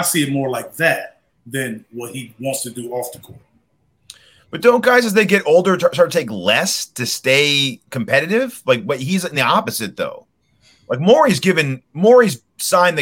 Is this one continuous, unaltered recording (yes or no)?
yes